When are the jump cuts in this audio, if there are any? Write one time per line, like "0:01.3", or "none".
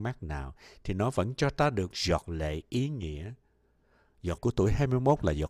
0:01.9
0:04.4

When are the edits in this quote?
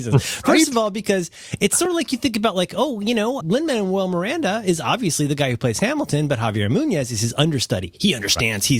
0:03.4

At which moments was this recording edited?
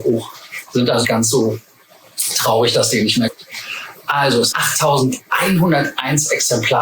0:01.0
0:03.3
0:04.5

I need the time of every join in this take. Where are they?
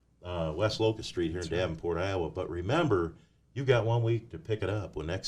none

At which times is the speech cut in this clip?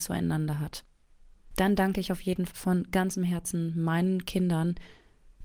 0:02.5

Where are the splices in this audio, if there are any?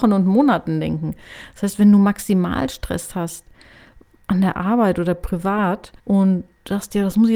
0:06.0

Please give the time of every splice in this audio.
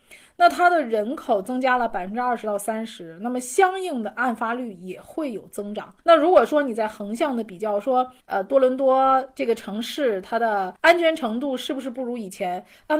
0:06.0
0:08.2
0:10.8

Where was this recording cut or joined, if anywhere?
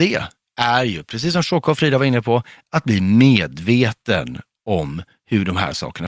none

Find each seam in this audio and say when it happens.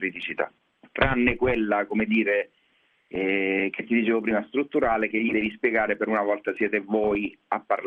none

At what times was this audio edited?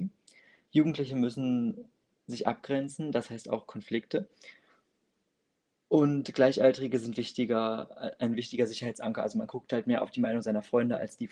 none

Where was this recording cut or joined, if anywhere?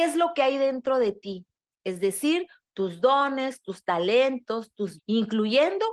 0:05.0

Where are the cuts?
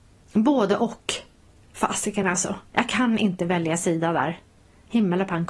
none

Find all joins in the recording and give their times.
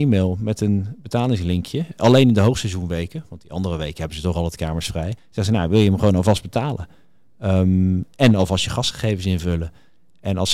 0:05.2

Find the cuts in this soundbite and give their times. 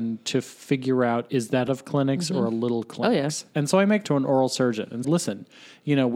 0:01.7
0:04.0
0:05.0

